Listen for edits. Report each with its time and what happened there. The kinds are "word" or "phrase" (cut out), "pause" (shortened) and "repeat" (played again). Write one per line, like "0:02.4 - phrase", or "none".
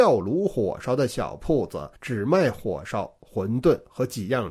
0:02.0 - pause